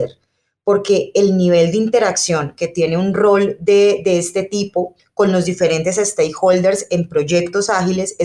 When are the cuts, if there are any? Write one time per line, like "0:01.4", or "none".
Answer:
none